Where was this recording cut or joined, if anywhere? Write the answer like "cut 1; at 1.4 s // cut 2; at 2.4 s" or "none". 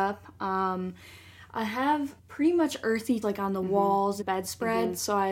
cut 1; at 2.2 s // cut 2; at 3.2 s // cut 3; at 4.2 s